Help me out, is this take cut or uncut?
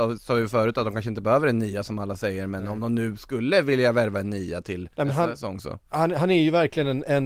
cut